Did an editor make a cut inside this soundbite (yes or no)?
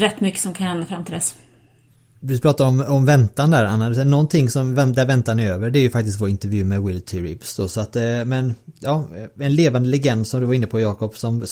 no